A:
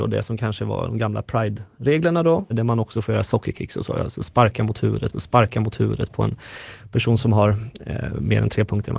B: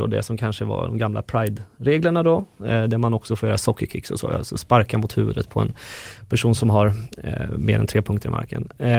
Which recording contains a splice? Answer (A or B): A